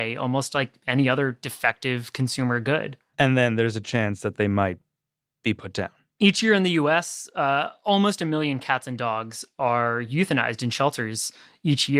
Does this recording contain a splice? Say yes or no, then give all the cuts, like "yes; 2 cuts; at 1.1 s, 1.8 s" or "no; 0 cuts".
no; 0 cuts